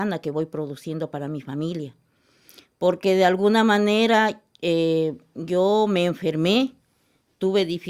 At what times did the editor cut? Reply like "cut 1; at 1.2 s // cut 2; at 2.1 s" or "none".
none